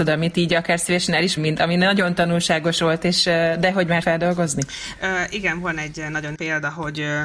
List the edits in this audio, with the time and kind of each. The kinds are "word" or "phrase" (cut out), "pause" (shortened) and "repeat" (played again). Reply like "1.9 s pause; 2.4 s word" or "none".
1.4 s word; 4.0 s word; 6.3 s word